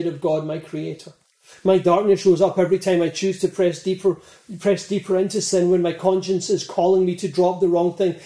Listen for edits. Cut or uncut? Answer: uncut